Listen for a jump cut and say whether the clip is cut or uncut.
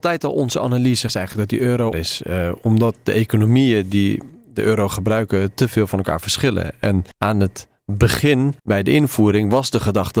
cut